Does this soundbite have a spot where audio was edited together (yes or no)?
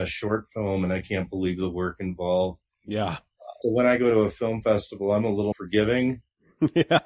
yes